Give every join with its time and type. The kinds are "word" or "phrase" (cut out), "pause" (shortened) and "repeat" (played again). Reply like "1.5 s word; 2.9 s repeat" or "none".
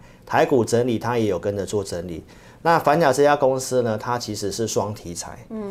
none